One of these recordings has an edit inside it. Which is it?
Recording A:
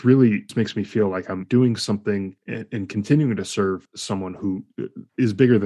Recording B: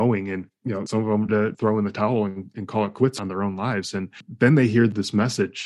B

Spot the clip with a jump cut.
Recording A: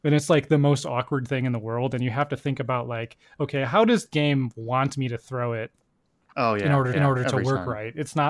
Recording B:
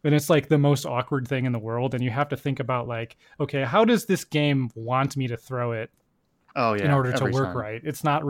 A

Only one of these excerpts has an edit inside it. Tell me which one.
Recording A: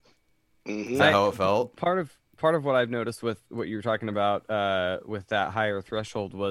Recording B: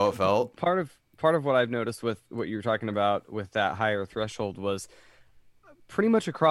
B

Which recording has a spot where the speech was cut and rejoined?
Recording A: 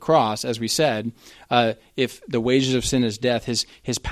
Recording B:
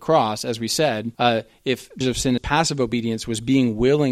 B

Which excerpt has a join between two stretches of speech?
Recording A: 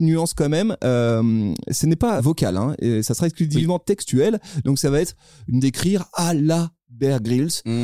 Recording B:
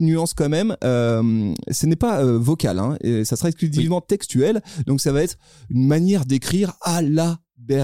A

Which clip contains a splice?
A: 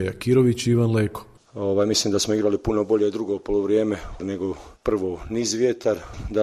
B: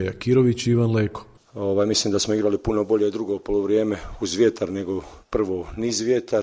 A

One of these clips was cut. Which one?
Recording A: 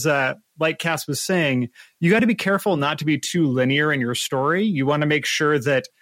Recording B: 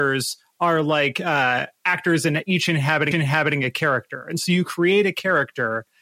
B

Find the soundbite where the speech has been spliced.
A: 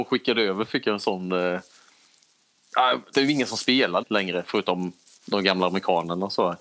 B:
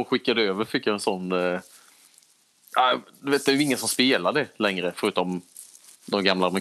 A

